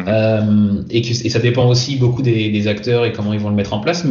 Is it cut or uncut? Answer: uncut